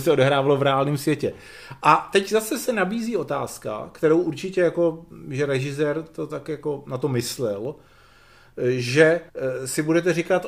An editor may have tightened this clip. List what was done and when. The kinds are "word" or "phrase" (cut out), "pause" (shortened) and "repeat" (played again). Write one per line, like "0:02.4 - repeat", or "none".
0:09.3 - pause